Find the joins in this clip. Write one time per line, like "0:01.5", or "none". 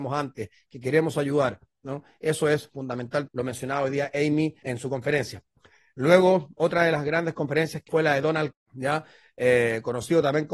0:03.3
0:04.6
0:07.9
0:08.5